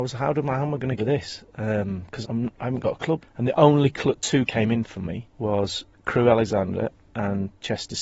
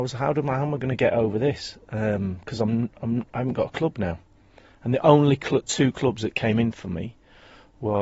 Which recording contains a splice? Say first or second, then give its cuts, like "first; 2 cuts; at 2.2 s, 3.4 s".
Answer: first; 5 cuts; at 1.0 s, 2.2 s, 3.2 s, 4.5 s, 5.3 s